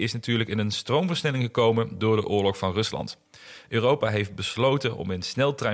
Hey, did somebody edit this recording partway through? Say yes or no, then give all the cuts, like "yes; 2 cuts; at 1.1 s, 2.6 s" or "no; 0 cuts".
no; 0 cuts